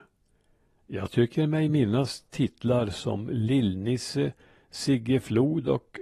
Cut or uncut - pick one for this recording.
uncut